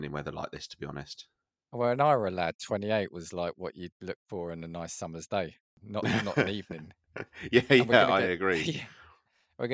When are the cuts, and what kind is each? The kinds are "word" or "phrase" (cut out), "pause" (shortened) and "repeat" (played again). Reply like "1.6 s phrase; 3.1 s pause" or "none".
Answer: none